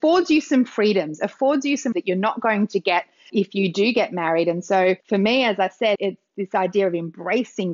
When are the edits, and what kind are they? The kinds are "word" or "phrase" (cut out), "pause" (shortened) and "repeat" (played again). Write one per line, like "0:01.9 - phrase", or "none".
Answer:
0:01.9 - word
0:03.3 - word
0:05.0 - pause
0:05.9 - word